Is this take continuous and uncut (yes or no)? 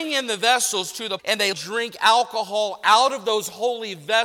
no